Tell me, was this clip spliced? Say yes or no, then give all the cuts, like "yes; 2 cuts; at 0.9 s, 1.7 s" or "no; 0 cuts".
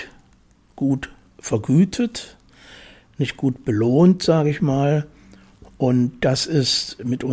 no; 0 cuts